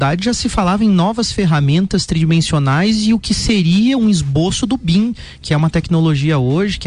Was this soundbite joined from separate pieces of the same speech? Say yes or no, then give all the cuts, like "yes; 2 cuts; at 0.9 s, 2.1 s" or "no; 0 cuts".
no; 0 cuts